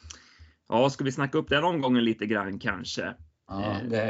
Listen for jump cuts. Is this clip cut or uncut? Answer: uncut